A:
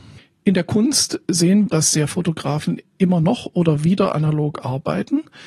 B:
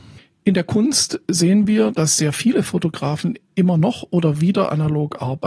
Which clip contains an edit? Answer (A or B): A